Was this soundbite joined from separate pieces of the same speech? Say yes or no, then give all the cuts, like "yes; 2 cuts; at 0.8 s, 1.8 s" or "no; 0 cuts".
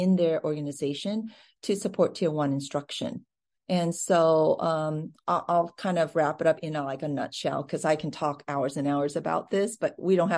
no; 0 cuts